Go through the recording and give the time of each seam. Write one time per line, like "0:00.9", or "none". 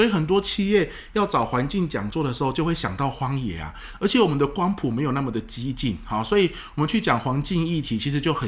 none